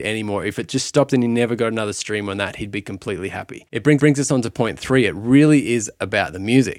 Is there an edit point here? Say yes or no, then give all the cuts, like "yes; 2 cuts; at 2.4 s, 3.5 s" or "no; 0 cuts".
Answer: yes; 1 cut; at 4.0 s